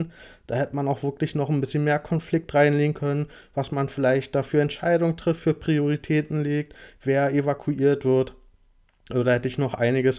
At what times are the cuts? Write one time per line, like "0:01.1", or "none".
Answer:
none